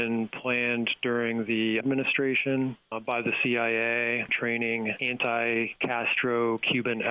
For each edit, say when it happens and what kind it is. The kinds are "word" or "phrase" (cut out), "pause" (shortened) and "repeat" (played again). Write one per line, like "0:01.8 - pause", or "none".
0:01.8 - word